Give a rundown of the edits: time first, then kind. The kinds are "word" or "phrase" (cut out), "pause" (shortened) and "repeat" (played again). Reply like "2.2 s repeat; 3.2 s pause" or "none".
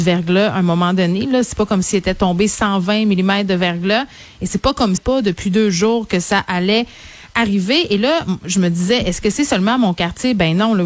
5.0 s phrase